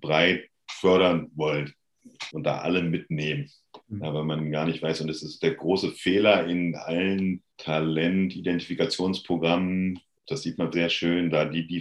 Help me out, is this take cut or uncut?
cut